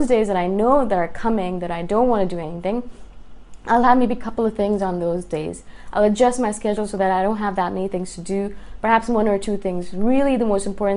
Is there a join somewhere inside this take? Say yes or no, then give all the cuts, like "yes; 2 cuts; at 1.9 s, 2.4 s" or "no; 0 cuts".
no; 0 cuts